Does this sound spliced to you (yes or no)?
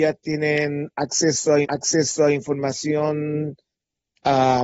yes